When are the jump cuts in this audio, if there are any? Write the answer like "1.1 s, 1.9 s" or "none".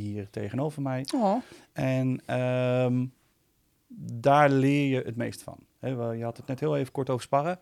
none